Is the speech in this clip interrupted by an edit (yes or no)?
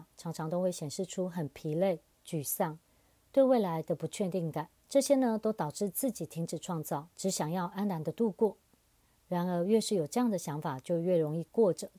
yes